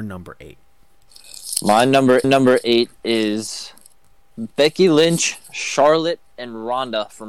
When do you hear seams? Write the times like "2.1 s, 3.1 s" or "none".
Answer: 2.2 s